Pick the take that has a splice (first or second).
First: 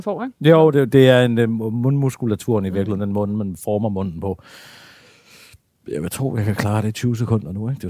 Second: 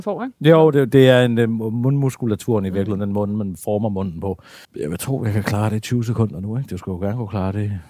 second